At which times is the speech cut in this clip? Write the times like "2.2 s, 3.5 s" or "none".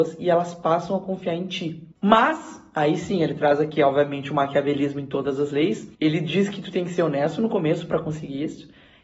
1.9 s, 5.9 s